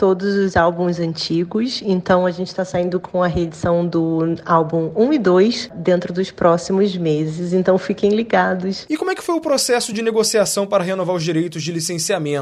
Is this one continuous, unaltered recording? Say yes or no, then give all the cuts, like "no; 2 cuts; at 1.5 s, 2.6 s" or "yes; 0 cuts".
yes; 0 cuts